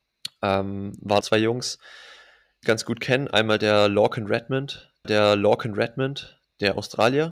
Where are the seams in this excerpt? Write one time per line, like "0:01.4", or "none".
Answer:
0:01.2
0:02.6
0:05.0